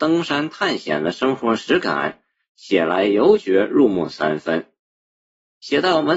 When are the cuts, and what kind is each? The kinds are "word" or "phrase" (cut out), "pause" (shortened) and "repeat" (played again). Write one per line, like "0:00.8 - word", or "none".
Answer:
none